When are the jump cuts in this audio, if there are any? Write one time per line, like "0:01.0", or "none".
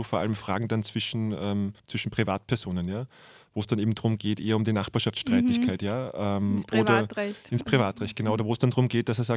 0:01.8